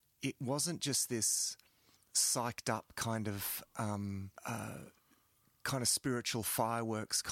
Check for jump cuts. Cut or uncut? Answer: cut